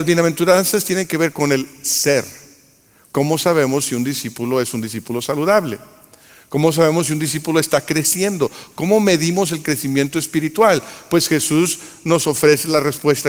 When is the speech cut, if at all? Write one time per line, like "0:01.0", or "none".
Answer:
none